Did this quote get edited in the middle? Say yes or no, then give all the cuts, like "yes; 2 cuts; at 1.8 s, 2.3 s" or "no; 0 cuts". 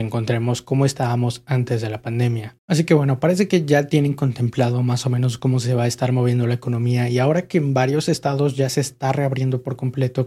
no; 0 cuts